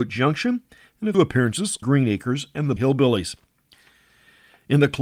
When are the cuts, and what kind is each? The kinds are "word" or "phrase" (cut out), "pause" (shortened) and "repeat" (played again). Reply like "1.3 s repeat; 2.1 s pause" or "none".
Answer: 1.1 s word; 1.8 s word; 2.8 s word